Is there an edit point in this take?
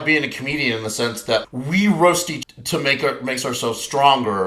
yes; 2 cuts; at 1.4 s, 2.4 s

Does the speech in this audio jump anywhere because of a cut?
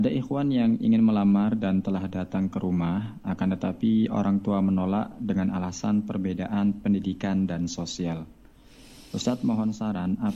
no; 0 cuts

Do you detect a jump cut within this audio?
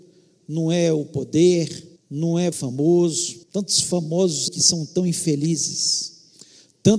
yes; 4 cuts; at 2.0 s, 2.5 s, 3.4 s, 4.5 s

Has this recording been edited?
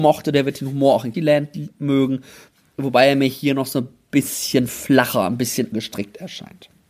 yes; 2 cuts; at 1.1 s, 5.7 s

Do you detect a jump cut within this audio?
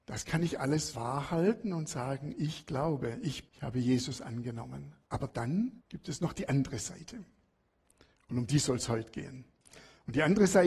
yes; 4 cuts; at 0.9 s, 3.4 s, 5.0 s, 5.8 s

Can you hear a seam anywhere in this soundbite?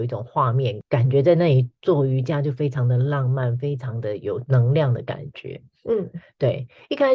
no; 0 cuts

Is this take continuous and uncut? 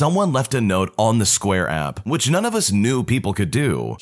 yes; 0 cuts

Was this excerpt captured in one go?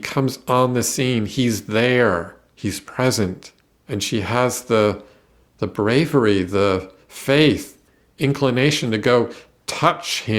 yes; 0 cuts

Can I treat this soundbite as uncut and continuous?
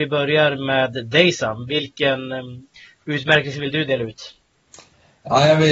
yes; 0 cuts

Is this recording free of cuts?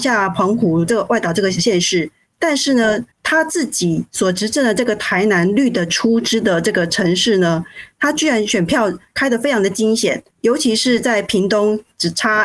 no; 2 cuts; at 3.1 s, 10.3 s

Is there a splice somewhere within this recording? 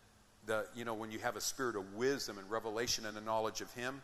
no; 0 cuts

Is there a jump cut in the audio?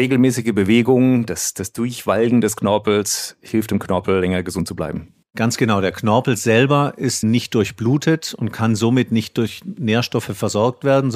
yes; 2 cuts; at 5.2 s, 7.2 s

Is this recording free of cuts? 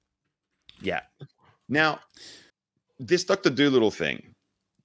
no; 1 cut; at 2.5 s

